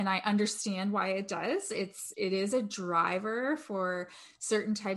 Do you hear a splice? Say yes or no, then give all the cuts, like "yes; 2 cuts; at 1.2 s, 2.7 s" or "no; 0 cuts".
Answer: yes; 1 cut; at 2.1 s